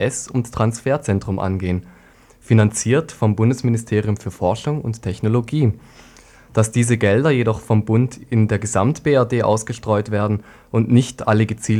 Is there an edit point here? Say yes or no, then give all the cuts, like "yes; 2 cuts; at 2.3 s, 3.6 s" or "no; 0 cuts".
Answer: no; 0 cuts